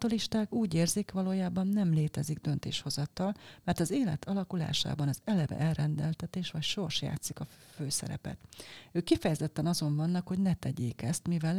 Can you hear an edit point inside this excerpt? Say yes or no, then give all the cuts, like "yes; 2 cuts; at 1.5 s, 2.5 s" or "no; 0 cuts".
no; 0 cuts